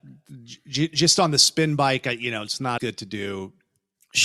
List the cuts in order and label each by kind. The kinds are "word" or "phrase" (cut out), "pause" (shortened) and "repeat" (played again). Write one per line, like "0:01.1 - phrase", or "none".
0:02.8 - word